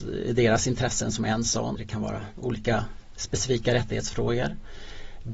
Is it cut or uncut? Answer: cut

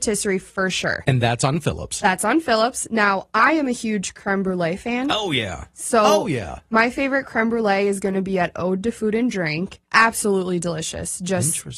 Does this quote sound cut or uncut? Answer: cut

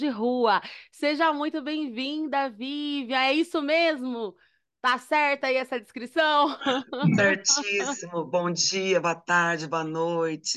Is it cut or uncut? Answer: uncut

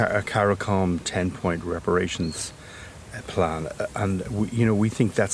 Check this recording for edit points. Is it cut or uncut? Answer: uncut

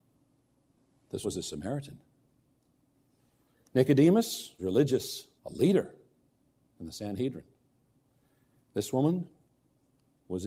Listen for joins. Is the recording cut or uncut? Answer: cut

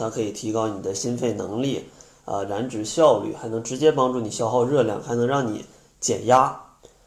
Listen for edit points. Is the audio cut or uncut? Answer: uncut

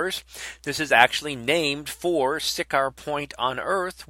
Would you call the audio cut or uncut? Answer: uncut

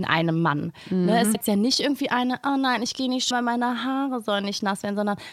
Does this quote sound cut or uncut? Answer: cut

